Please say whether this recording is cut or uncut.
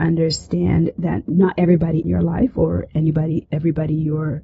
cut